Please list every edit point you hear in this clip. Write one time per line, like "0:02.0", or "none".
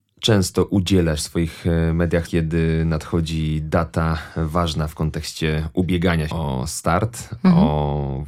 0:01.2
0:02.2
0:06.3